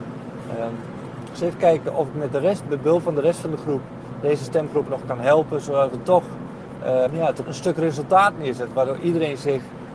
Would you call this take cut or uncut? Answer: cut